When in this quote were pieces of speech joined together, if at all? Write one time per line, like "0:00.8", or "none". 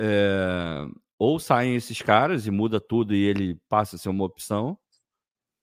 none